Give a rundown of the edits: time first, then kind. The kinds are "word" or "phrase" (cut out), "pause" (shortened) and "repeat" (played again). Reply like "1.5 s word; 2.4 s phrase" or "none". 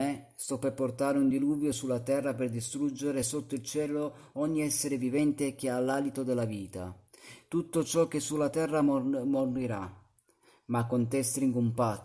none